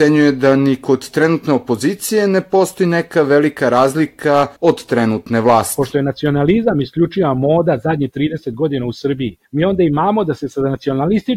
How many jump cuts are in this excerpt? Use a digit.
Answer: 2